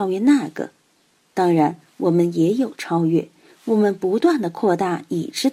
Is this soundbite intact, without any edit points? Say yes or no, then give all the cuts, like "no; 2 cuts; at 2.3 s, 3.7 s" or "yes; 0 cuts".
yes; 0 cuts